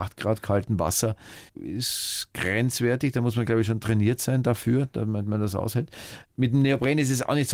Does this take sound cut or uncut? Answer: cut